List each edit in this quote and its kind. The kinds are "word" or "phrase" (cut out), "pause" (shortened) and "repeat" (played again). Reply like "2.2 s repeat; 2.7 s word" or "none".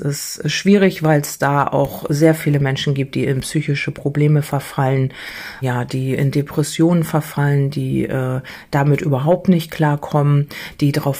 5.6 s word